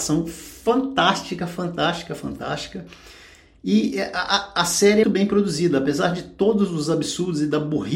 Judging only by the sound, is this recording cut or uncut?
cut